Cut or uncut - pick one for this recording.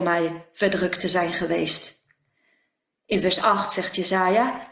uncut